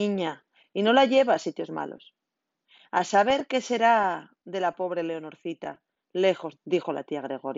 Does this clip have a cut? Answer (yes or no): yes